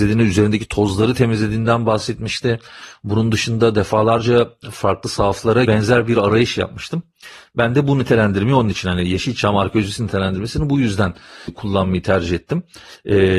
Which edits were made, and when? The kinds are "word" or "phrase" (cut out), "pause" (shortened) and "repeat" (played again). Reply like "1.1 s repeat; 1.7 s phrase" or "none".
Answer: 5.7 s phrase